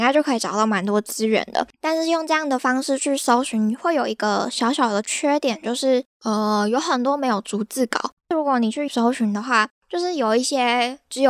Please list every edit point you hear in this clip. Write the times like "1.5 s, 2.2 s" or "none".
1.7 s, 8.9 s, 9.8 s